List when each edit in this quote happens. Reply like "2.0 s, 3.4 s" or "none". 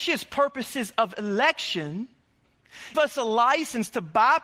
2.9 s